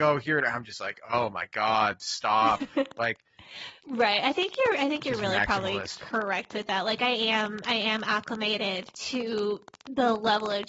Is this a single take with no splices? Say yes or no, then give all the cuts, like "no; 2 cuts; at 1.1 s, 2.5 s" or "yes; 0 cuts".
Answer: no; 2 cuts; at 3.8 s, 8.9 s